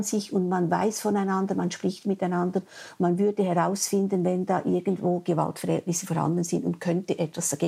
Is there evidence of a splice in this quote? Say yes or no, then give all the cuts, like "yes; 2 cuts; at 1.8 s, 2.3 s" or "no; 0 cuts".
no; 0 cuts